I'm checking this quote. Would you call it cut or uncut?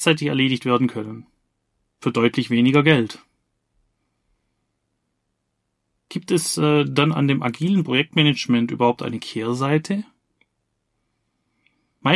uncut